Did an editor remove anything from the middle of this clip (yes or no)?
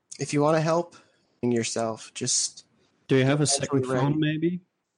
yes